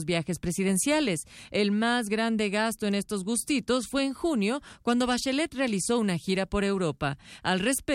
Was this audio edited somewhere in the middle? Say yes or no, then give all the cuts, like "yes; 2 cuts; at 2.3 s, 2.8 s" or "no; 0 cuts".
no; 0 cuts